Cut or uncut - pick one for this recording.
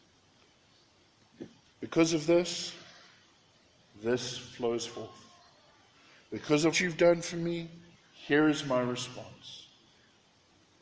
cut